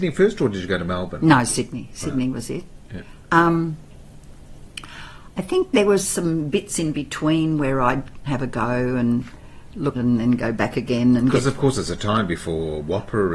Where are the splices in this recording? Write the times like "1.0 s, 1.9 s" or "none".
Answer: 8.3 s, 9.9 s